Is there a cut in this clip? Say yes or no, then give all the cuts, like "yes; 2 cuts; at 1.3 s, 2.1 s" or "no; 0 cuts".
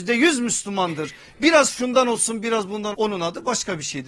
yes; 1 cut; at 2.9 s